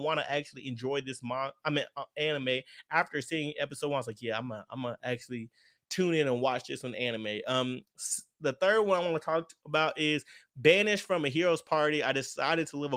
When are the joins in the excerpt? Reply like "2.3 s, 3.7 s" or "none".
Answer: none